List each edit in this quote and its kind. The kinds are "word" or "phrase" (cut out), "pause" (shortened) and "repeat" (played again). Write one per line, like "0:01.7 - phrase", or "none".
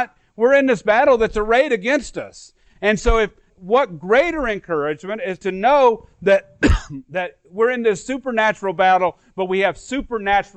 0:03.5 - word
0:05.4 - word

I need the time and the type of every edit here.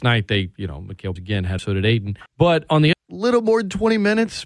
0:01.2 - word
0:01.6 - phrase
0:02.3 - pause
0:02.9 - phrase

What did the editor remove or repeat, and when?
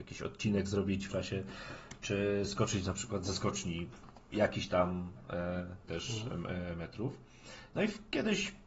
0:01.1 - word
0:05.9 - word

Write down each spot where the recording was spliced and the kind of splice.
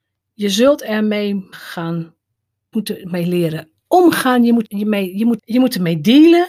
0:01.5 - word
0:02.7 - word
0:04.6 - word
0:05.4 - word

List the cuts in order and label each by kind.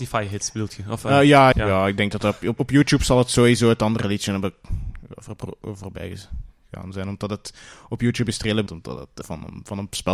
0:01.5 - word
0:02.6 - word
0:08.7 - word
0:09.2 - word

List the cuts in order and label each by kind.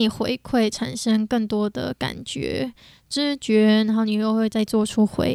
none

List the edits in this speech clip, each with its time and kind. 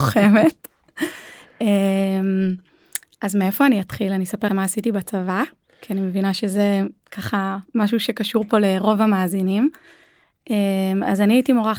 0:04.5 - word

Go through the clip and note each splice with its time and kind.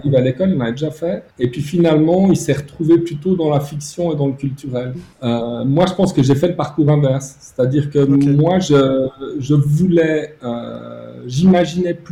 0:01.3 - pause
0:05.1 - pause

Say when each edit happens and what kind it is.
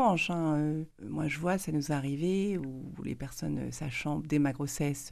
0:00.9 - pause

